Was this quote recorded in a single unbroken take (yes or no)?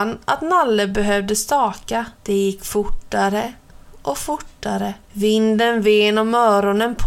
no